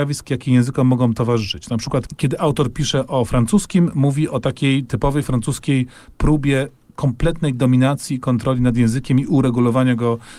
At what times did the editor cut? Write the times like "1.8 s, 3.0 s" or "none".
none